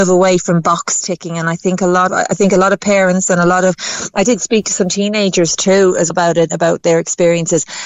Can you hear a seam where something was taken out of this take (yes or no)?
yes